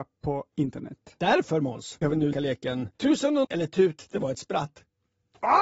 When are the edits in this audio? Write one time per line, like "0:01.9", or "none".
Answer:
0:02.0
0:02.3
0:02.9
0:03.4